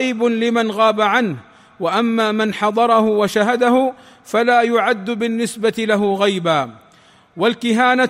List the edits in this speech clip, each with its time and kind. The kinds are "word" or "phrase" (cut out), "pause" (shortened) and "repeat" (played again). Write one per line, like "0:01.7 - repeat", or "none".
none

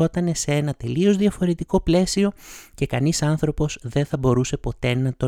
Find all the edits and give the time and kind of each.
none

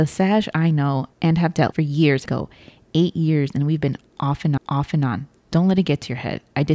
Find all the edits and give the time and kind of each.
0:01.1 - pause
0:01.7 - word
0:02.3 - phrase
0:04.6 - repeat

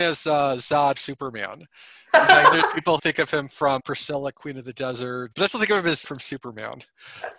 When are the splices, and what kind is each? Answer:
0:00.9 - word
0:02.5 - word
0:03.0 - word
0:03.8 - word
0:05.3 - word
0:06.0 - word

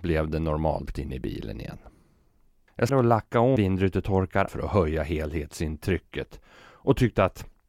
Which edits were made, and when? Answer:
0:00.9 - word
0:02.9 - word
0:03.6 - word
0:04.5 - word

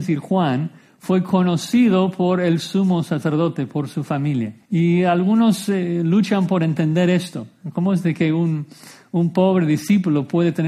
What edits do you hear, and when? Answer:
0:04.6 - pause

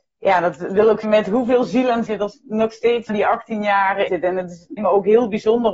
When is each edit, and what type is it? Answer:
0:01.0 - word
0:02.1 - word
0:03.1 - word
0:04.1 - word
0:04.8 - word

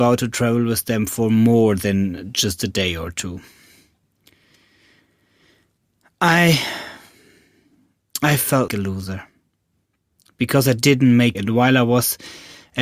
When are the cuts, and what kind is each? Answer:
0:08.7 - word
0:11.3 - phrase

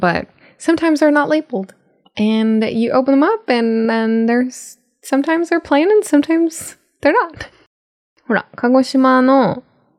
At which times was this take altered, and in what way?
none

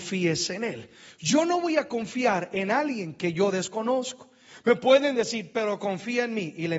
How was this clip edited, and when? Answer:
none

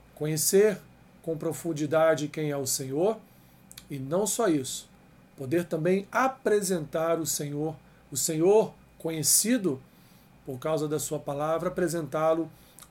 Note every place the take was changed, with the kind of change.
none

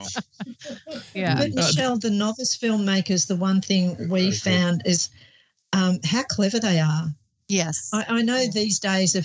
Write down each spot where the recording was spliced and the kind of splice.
none

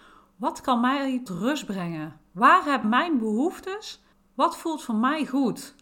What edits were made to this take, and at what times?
0:01.3 - word
0:02.8 - word
0:04.1 - pause

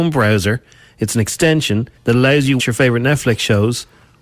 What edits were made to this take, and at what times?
0:02.0 - pause
0:02.6 - word

